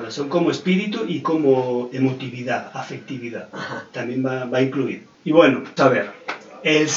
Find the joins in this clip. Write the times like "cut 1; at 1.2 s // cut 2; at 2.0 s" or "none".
cut 1; at 1.2 s // cut 2; at 5.8 s